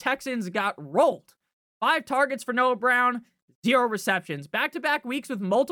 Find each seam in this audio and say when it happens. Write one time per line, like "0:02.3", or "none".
none